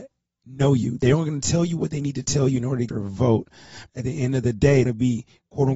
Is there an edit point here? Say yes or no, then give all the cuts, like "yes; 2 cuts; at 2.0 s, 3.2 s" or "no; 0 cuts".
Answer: yes; 3 cuts; at 2.9 s, 3.9 s, 4.9 s